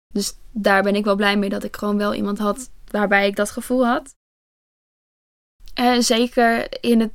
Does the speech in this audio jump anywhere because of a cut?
no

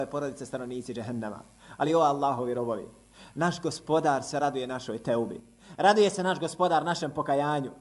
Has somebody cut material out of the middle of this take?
no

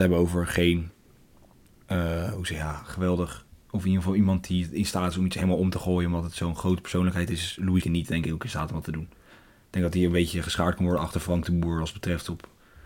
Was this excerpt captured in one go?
no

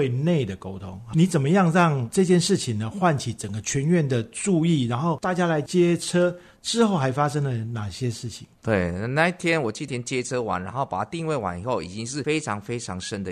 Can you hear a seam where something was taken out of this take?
yes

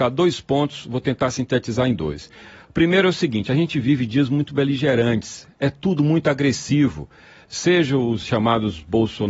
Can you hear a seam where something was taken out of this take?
no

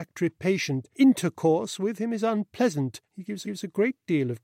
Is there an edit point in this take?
yes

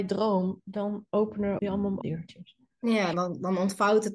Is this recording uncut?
no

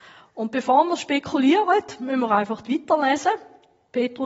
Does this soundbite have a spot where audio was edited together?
no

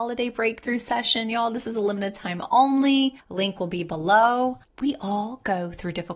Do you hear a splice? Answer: no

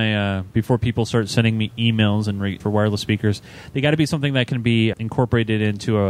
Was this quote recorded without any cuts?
no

